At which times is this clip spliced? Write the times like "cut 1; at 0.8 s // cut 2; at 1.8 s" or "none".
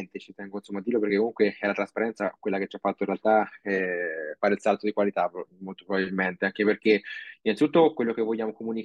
none